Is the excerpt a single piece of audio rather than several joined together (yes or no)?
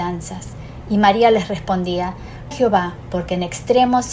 no